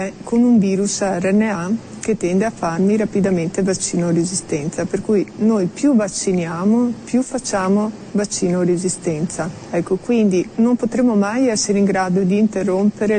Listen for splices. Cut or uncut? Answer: uncut